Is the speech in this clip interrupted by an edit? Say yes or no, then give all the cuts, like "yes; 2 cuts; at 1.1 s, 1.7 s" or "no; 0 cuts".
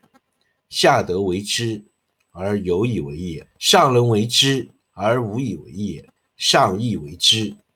yes; 3 cuts; at 3.5 s, 4.8 s, 6.2 s